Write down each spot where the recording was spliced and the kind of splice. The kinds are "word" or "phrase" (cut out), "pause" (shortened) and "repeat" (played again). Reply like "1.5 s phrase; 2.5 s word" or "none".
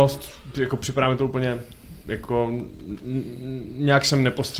none